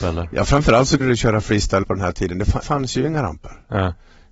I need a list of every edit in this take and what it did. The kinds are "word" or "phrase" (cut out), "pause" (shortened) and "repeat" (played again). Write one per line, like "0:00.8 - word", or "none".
0:01.0 - word
0:01.8 - word
0:02.6 - word